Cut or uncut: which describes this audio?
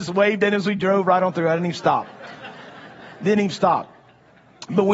uncut